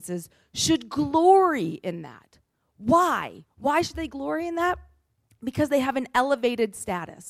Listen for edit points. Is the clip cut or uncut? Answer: uncut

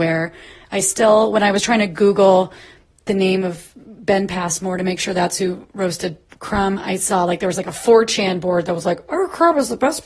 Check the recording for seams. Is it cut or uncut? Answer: cut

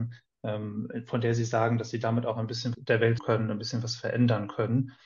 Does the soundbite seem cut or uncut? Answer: cut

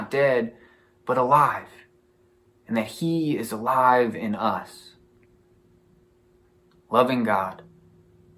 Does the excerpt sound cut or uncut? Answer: uncut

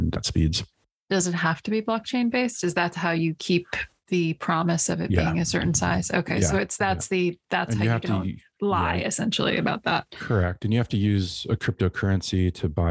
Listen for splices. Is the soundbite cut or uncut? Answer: uncut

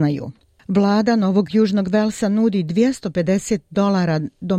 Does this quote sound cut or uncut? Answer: uncut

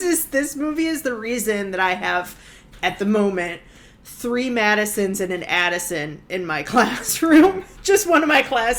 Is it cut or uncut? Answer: uncut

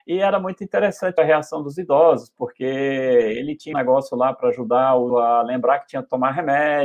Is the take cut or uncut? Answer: cut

